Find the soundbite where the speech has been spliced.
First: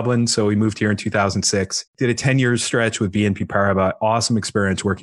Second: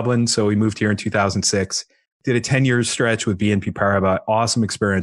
first; 1 cut; at 1.9 s

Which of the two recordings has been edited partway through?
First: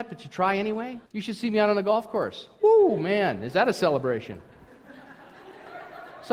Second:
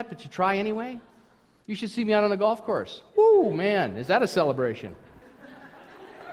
first; 1 cut; at 1.1 s

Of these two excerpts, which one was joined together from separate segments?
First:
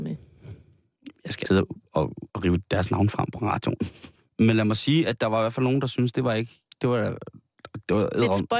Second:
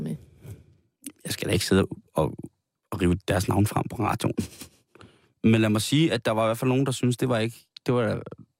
first; 3 cuts; at 1.5 s, 2.3 s, 4.2 s

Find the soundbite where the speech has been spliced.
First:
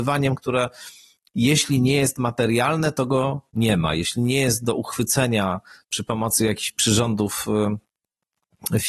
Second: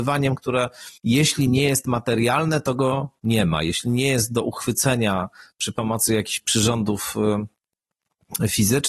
second; 1 cut; at 1.0 s

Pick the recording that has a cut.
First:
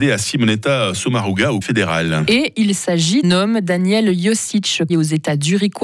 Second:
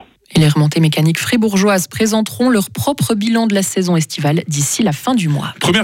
first; 3 cuts; at 1.6 s, 3.2 s, 4.9 s

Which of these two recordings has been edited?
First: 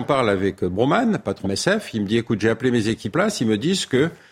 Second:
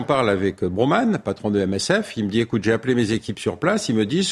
first; 2 cuts; at 1.4 s, 3.1 s

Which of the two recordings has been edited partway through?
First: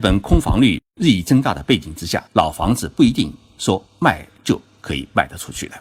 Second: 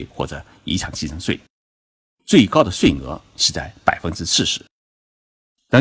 first; 1 cut; at 2.3 s

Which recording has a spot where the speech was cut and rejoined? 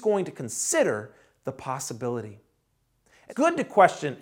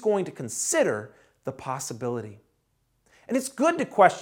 first; 1 cut; at 3.3 s

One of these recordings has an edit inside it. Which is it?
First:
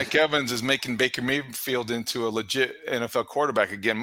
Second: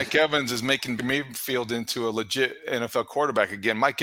second; 1 cut; at 1.0 s

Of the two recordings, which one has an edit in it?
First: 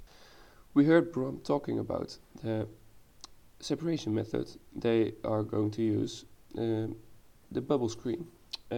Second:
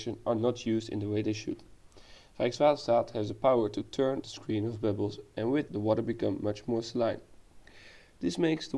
second; 2 cuts; at 4.2 s, 5.7 s

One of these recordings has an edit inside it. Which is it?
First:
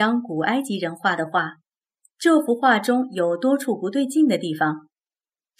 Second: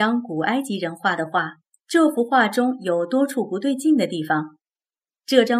second; 1 cut; at 1.7 s

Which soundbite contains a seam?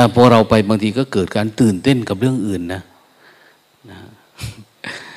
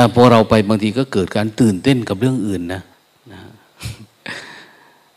second; 1 cut; at 2.9 s

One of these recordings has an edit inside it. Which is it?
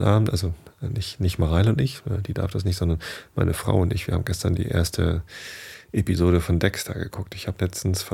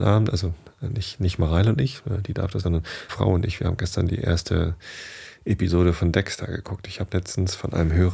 second; 2 cuts; at 2.6 s, 3.1 s

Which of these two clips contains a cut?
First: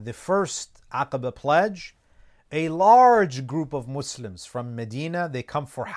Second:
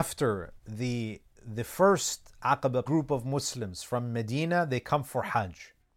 second; 1 cut; at 2.9 s

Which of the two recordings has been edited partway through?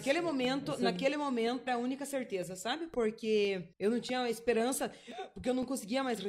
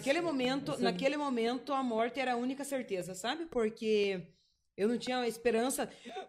first; 2 cuts; at 1.7 s, 3.7 s

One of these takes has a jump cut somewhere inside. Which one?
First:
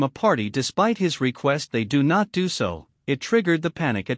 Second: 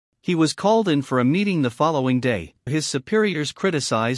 second; 1 cut; at 2.7 s

